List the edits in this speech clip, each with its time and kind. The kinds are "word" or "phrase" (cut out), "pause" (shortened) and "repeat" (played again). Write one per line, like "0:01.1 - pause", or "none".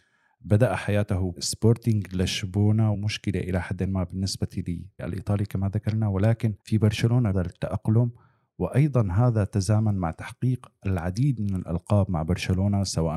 0:01.4 - word
0:02.9 - phrase
0:05.0 - word
0:06.6 - pause
0:07.3 - phrase

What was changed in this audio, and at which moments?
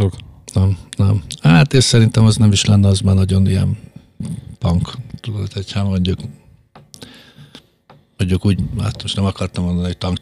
none

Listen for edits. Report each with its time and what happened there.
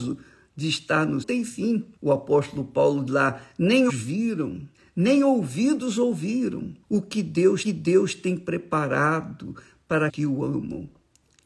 0:01.2 - phrase
0:02.0 - pause
0:03.1 - word
0:03.9 - word
0:04.7 - pause
0:06.8 - pause
0:07.6 - repeat
0:10.1 - word

